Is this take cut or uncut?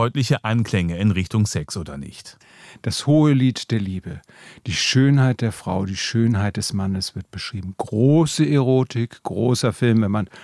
uncut